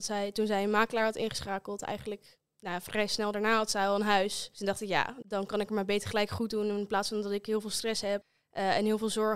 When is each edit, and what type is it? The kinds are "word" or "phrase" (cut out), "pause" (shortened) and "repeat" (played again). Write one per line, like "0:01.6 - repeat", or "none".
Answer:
none